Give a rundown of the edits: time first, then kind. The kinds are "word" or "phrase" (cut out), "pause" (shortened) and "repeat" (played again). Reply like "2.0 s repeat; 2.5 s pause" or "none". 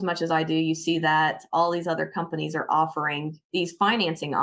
3.4 s pause